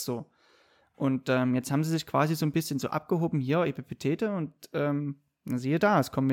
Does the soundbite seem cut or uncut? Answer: uncut